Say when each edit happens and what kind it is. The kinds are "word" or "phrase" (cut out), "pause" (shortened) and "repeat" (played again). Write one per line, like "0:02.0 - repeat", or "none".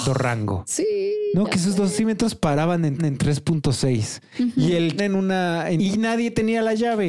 0:03.0 - repeat
0:05.0 - phrase
0:05.8 - phrase